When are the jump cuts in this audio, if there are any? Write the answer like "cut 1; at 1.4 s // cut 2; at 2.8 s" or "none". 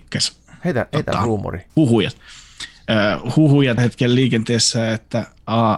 cut 1; at 1.7 s // cut 2; at 3.8 s